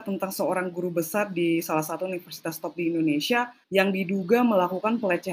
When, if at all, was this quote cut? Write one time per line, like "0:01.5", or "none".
0:03.6

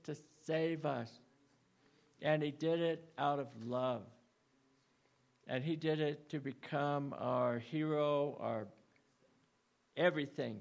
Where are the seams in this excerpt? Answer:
none

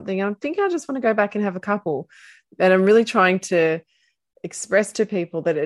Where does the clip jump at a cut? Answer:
none

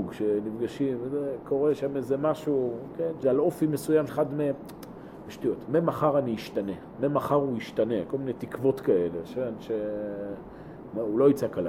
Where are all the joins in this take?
0:03.2
0:04.1

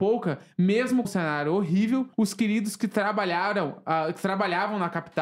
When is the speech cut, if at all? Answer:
0:01.0
0:02.1

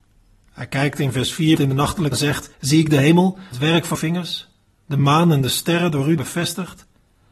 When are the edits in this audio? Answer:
0:01.6
0:02.1
0:02.5
0:03.5
0:03.9
0:06.2

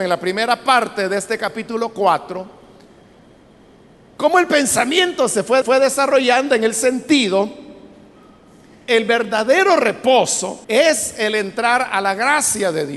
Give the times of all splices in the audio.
0:05.6
0:08.9
0:10.6

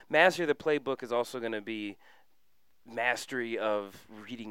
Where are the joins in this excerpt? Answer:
none

